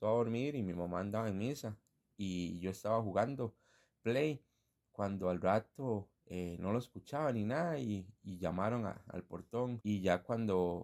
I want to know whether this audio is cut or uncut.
uncut